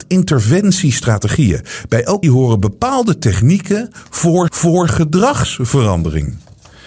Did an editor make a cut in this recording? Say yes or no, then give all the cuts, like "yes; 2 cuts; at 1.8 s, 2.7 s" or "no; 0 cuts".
yes; 2 cuts; at 2.2 s, 4.5 s